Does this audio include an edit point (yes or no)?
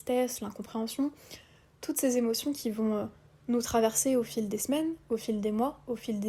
no